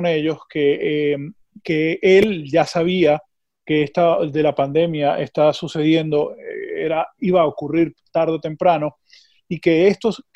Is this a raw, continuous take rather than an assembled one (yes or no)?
yes